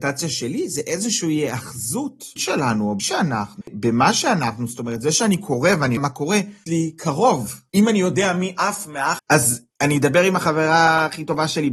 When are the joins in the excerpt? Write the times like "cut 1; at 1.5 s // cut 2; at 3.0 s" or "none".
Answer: cut 1; at 2.4 s // cut 2; at 3.0 s // cut 3; at 3.6 s // cut 4; at 6.0 s // cut 5; at 6.7 s // cut 6; at 9.2 s

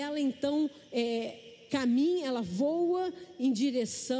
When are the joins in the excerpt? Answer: none

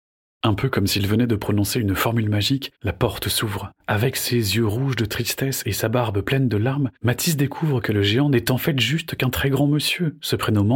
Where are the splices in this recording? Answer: cut 1; at 2.7 s // cut 2; at 3.8 s // cut 3; at 7.0 s

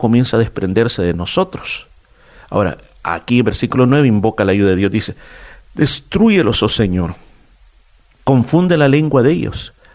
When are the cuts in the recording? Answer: none

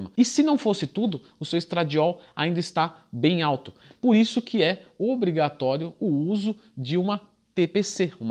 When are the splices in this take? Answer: none

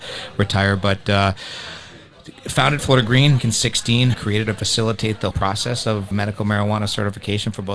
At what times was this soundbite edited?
cut 1; at 2.8 s // cut 2; at 3.4 s // cut 3; at 4.1 s // cut 4; at 4.5 s // cut 5; at 5.3 s // cut 6; at 6.1 s

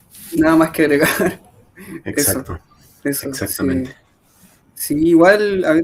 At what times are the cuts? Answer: none

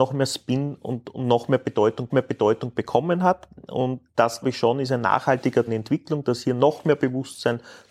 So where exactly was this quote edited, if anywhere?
cut 1; at 2.1 s // cut 2; at 4.4 s // cut 3; at 5.7 s

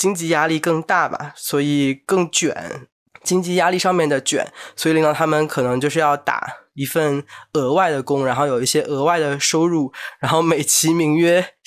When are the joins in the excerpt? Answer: none

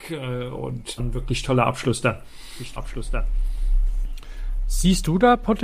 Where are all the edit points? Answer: cut 1; at 1.0 s // cut 2; at 2.8 s

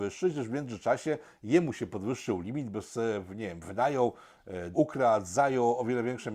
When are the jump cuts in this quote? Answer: cut 1; at 4.7 s

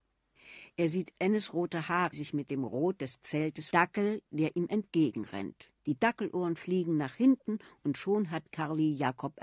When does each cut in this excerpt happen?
cut 1; at 2.1 s // cut 2; at 3.7 s // cut 3; at 5.8 s

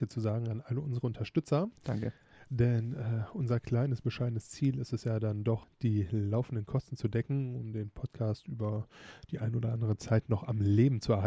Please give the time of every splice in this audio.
cut 1; at 1.8 s

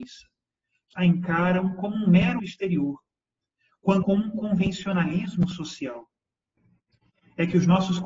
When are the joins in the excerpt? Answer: cut 1; at 0.9 s // cut 2; at 2.4 s // cut 3; at 4.0 s

